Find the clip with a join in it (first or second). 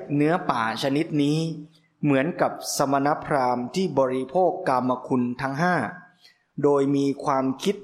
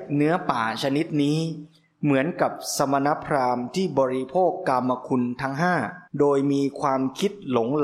second